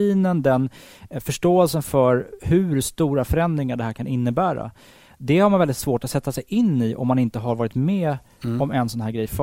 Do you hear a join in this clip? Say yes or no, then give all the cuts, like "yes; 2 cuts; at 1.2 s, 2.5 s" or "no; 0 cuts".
no; 0 cuts